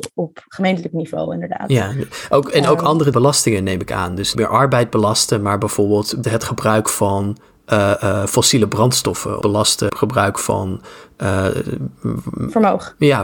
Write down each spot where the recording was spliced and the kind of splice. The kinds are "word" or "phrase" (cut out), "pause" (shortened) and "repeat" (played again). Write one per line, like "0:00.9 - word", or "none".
0:03.1 - word
0:04.3 - word
0:06.2 - word
0:09.4 - word
0:09.9 - word

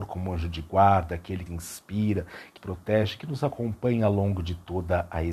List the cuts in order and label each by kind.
0:01.5 - phrase
0:02.6 - word

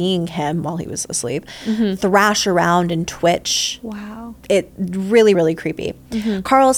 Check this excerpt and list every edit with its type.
0:04.4 - pause
0:05.3 - word

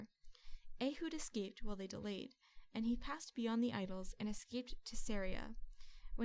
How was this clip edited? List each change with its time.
none

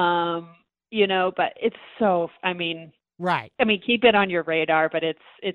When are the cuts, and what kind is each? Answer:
0:03.5 - pause

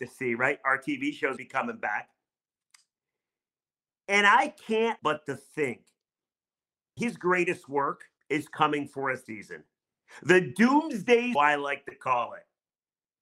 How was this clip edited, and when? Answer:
0:01.4 - word
0:05.0 - word
0:07.0 - word
0:08.2 - pause
0:09.3 - word
0:11.3 - word

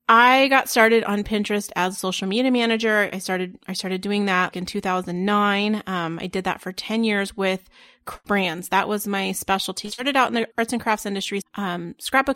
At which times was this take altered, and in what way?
0:04.5 - word
0:08.2 - word
0:10.5 - pause
0:11.4 - word

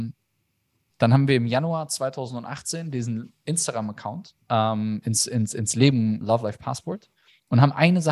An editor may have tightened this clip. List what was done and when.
0:06.2 - phrase

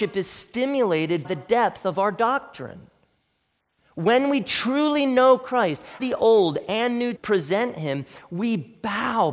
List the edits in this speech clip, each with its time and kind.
0:01.2 - word
0:06.0 - word
0:07.2 - word

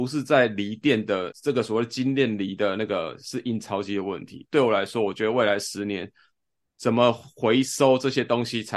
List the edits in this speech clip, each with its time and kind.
0:01.3 - word

